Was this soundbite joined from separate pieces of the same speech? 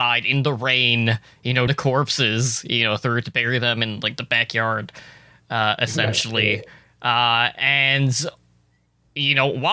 yes; 1 cut; at 1.7 s

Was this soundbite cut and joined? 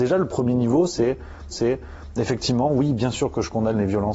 yes; 1 cut; at 1.5 s

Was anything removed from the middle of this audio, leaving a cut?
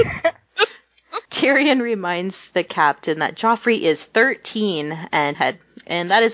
yes; 2 cuts; at 1.3 s, 5.3 s

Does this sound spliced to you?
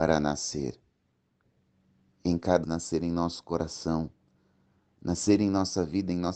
yes; 1 cut; at 2.6 s

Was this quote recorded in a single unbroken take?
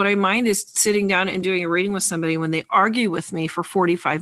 yes; 0 cuts

